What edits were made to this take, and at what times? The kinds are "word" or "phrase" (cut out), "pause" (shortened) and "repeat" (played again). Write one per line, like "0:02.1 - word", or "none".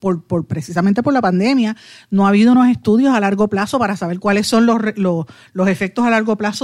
none